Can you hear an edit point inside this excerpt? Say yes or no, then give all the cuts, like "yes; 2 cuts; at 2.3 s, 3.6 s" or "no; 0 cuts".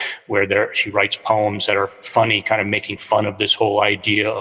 no; 0 cuts